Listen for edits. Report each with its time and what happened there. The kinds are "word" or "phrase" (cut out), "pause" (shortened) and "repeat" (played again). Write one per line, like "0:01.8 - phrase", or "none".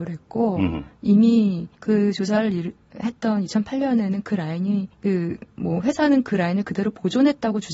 0:01.7 - pause
0:04.9 - pause